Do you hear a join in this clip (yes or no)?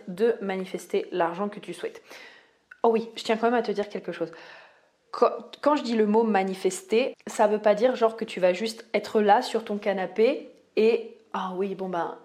yes